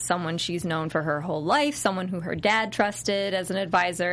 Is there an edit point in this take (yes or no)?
no